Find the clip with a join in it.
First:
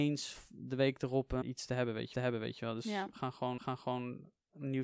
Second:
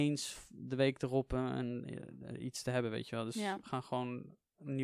first; 3 cuts; at 1.4 s, 2.1 s, 3.6 s

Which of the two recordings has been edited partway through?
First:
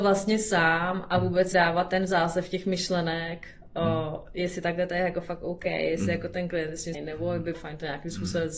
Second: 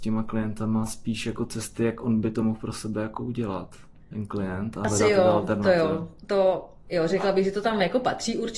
first; 3 cuts; at 1.5 s, 6.9 s, 7.5 s

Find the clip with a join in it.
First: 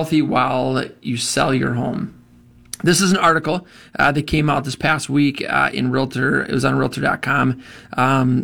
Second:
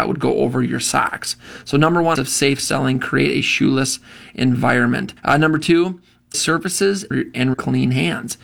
second; 5 cuts; at 2.2 s, 5.2 s, 6.3 s, 7.1 s, 7.5 s

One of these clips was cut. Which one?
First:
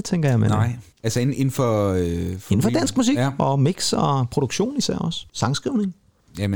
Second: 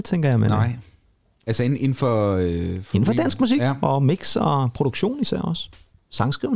first; 2 cuts; at 0.9 s, 5.3 s

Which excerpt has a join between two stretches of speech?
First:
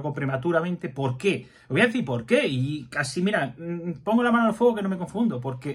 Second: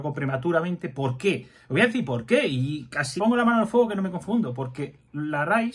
second; 1 cut; at 3.2 s

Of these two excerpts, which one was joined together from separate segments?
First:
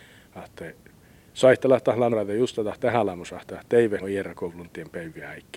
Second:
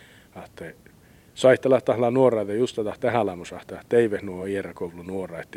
first; 3 cuts; at 2.1 s, 4.0 s, 4.6 s

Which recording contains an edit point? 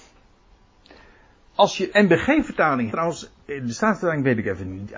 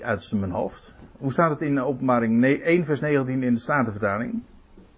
first; 3 cuts; at 1.9 s, 2.9 s, 3.4 s

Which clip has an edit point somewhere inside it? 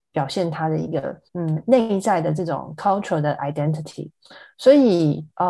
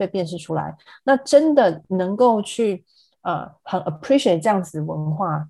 first; 1 cut; at 1.3 s

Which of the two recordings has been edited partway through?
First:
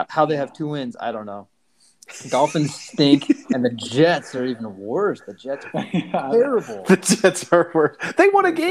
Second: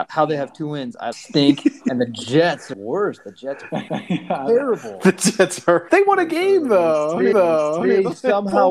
second; 5 cuts; at 1.1 s, 2.7 s, 3.9 s, 5.9 s, 7.3 s

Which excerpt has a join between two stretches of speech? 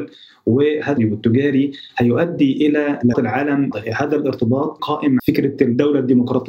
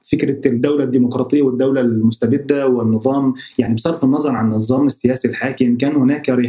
first; 5 cuts; at 1.0 s, 3.1 s, 3.7 s, 4.8 s, 5.2 s

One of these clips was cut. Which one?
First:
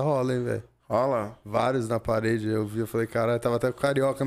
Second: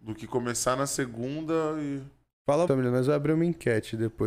second; 1 cut; at 2.7 s

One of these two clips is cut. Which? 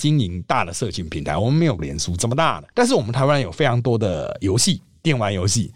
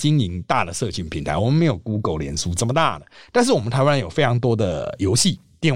first; 2 cuts; at 1.8 s, 2.7 s

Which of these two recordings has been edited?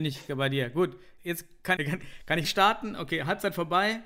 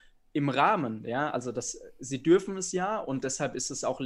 first; 3 cuts; at 1.2 s, 1.8 s, 2.4 s

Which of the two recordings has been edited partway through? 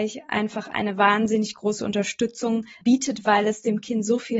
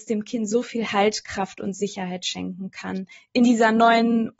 first; 1 cut; at 2.7 s

